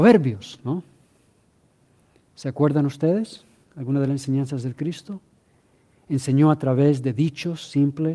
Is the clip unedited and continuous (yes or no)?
yes